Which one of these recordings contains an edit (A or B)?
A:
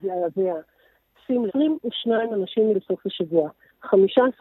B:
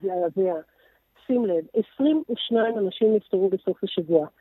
A